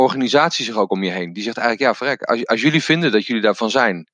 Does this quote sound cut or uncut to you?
uncut